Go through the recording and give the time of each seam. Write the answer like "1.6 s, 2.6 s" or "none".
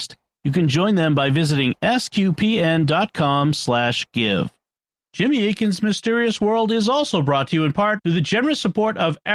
none